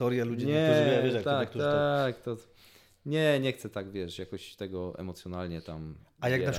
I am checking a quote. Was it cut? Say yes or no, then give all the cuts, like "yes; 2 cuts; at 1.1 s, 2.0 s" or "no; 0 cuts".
no; 0 cuts